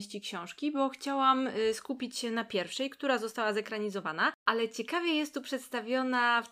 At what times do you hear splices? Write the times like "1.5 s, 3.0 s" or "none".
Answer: none